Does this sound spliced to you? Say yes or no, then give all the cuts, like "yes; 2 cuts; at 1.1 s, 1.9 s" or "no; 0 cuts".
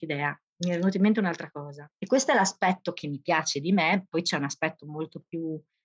yes; 1 cut; at 1.9 s